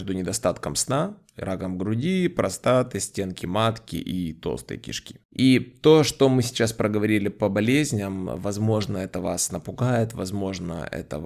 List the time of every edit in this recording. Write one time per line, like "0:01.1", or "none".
0:05.2